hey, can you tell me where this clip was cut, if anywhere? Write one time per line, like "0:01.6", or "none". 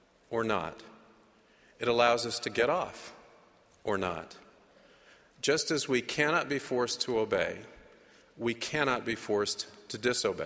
none